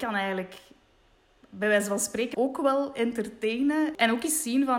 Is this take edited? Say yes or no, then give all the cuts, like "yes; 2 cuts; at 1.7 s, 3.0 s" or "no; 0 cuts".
yes; 1 cut; at 2.3 s